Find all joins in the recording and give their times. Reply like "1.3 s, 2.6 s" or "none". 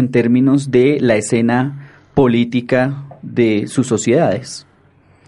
none